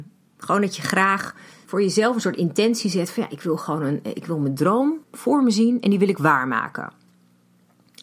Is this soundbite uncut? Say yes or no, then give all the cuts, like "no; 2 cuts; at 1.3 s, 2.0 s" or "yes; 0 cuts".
no; 2 cuts; at 1.6 s, 5.0 s